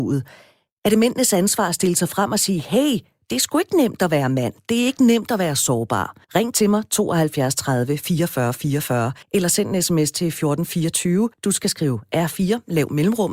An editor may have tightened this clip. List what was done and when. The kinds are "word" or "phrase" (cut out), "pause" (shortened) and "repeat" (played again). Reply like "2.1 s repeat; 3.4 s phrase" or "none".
6.2 s pause; 9.2 s pause; 11.3 s pause